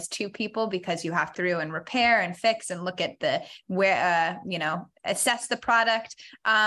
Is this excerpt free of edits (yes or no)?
no